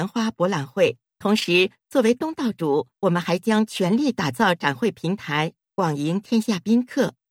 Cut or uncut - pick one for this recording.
cut